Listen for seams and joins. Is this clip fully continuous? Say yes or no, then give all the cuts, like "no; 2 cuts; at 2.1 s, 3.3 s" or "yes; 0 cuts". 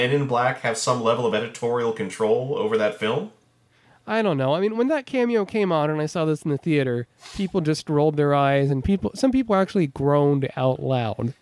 yes; 0 cuts